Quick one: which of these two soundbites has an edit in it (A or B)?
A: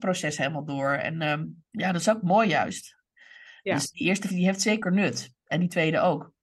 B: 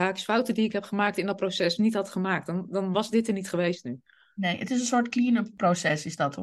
A